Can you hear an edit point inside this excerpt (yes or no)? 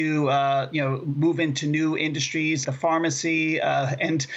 yes